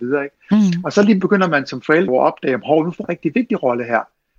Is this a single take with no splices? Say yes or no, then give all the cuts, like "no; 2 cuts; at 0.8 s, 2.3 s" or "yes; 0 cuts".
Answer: no; 3 cuts; at 1.2 s, 2.1 s, 3.0 s